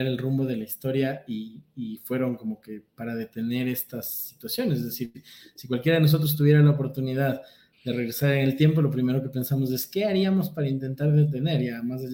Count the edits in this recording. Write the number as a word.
zero